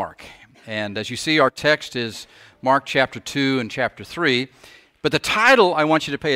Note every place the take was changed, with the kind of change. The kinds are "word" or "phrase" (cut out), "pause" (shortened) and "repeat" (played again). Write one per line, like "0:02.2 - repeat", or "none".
none